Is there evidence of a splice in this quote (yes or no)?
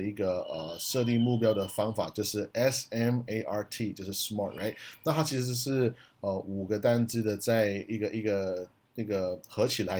no